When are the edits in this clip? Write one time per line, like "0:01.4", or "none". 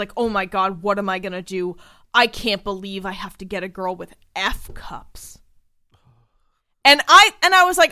none